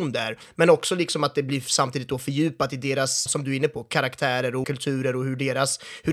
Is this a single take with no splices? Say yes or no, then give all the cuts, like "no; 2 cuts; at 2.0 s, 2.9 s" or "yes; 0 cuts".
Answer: no; 2 cuts; at 3.3 s, 4.6 s